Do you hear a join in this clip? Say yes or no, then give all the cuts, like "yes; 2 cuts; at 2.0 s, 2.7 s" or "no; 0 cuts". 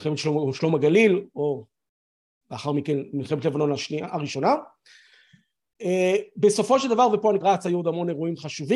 yes; 1 cut; at 7.4 s